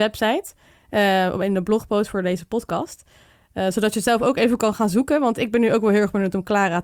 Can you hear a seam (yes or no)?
no